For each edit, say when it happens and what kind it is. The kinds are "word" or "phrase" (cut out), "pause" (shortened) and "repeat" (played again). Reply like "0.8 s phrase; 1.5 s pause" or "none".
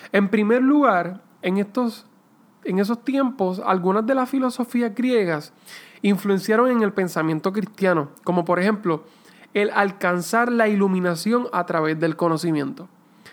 none